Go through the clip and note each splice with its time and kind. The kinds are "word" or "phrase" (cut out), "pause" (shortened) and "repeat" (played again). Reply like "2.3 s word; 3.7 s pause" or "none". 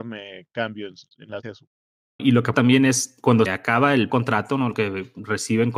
1.4 s word; 2.2 s word; 2.5 s word; 3.5 s word; 4.1 s word; 4.7 s word

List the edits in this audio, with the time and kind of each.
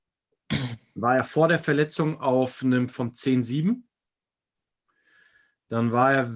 2.9 s word

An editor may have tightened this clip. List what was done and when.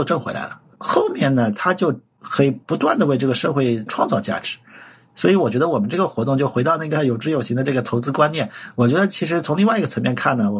none

